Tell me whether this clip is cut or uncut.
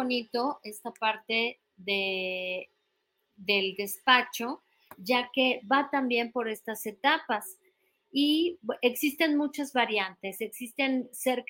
uncut